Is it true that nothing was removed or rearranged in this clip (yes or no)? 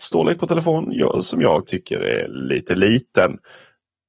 no